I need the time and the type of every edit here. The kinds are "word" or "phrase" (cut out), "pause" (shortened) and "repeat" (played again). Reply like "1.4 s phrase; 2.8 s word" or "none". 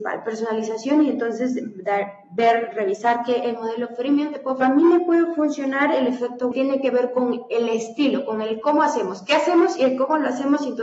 4.6 s phrase; 6.5 s phrase